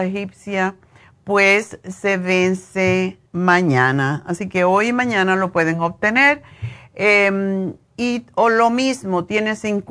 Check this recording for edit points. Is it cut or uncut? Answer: cut